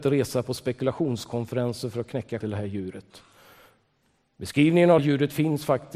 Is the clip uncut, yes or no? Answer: no